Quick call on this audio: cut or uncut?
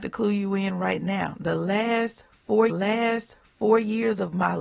cut